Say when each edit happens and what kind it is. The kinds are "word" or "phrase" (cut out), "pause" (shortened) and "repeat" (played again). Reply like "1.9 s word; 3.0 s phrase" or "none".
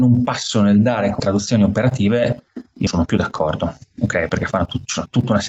1.2 s word; 2.9 s word